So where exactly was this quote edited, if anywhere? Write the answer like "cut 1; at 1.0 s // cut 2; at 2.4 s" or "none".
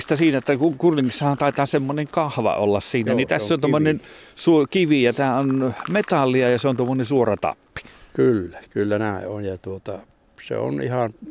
none